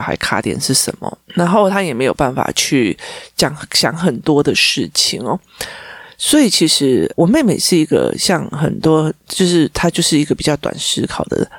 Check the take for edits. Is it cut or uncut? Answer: cut